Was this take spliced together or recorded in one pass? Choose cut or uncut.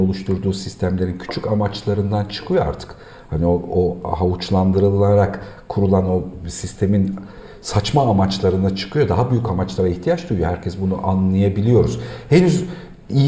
uncut